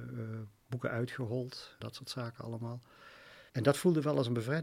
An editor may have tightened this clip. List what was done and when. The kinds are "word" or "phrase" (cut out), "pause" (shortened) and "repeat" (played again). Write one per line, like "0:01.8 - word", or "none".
0:01.8 - word
0:03.5 - pause